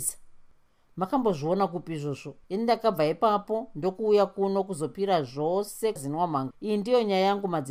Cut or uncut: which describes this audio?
cut